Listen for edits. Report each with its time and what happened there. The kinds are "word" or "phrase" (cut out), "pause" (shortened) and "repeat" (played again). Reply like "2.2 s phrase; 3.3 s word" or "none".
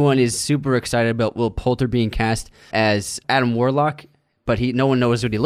2.7 s word; 3.2 s word

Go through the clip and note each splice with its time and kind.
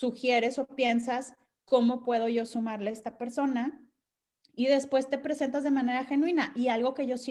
none

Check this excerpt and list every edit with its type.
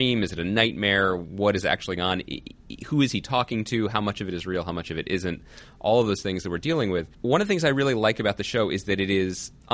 2.0 s word; 7.1 s pause

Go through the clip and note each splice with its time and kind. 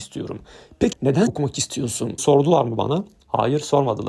0.9 s word; 1.3 s word; 2.2 s word

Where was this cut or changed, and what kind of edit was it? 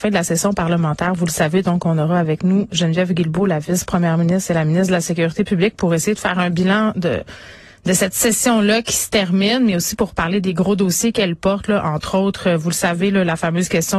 none

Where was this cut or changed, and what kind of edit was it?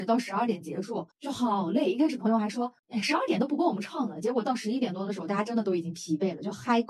1.1 s pause; 2.8 s pause

